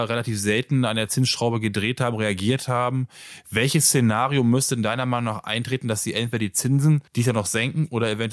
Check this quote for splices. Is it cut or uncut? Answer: cut